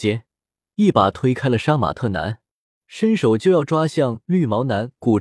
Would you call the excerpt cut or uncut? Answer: uncut